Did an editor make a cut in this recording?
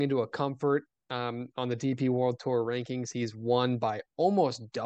no; 0 cuts

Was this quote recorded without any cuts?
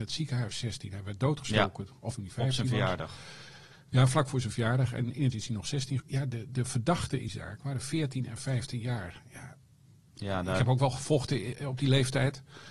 no; 4 cuts; at 2.1 s, 5.3 s, 6.0 s, 7.3 s

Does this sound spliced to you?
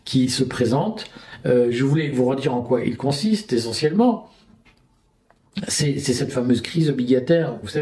no; 0 cuts

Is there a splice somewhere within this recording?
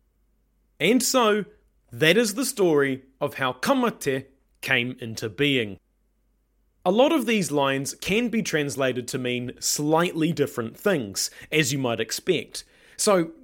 no; 0 cuts

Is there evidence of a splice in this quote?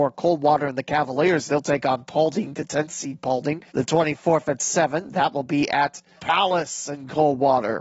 yes; 2 cuts; at 3.7 s, 6.2 s

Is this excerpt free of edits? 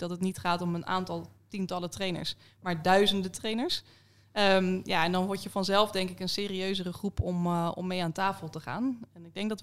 yes; 0 cuts

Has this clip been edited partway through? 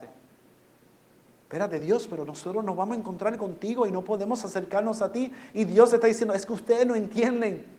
no; 0 cuts

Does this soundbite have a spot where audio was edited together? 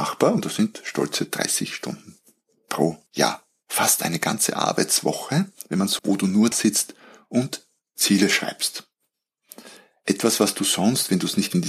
yes; 3 cuts; at 3.1 s, 6.0 s, 6.5 s

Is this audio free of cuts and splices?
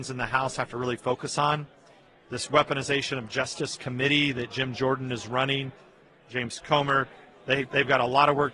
yes; 0 cuts

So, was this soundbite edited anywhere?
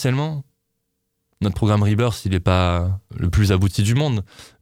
yes; 1 cut; at 3.1 s

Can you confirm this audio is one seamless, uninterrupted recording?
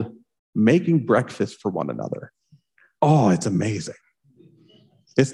yes; 0 cuts

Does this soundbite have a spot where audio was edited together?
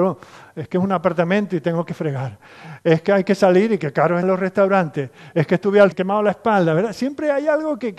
yes; 2 cuts; at 4.2 s, 5.9 s

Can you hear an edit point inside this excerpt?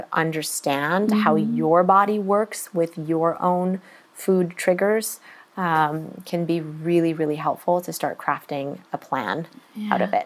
no; 0 cuts

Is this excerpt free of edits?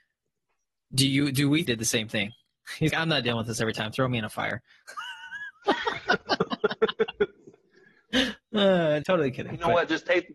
no; 3 cuts; at 1.7 s, 2.9 s, 9.0 s

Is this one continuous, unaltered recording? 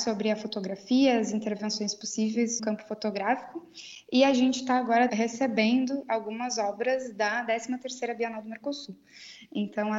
no; 2 cuts; at 2.6 s, 5.1 s

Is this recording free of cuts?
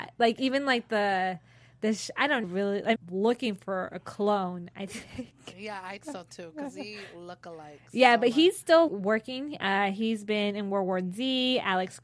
no; 4 cuts; at 2.4 s, 3.0 s, 6.0 s, 8.9 s

